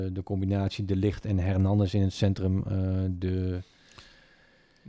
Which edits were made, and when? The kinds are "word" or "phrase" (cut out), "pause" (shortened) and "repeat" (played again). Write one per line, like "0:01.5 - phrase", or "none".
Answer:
none